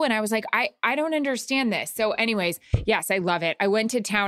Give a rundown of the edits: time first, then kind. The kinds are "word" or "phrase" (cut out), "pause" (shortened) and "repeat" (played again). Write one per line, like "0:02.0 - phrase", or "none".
none